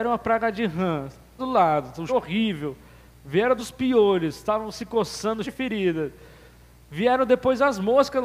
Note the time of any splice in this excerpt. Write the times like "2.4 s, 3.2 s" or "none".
1.4 s, 2.1 s, 3.6 s, 5.4 s